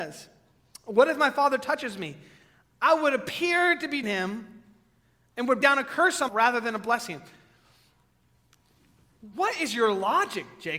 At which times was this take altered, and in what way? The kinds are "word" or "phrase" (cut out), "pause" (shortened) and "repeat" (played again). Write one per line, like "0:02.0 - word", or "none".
0:04.0 - word
0:05.6 - word
0:06.3 - word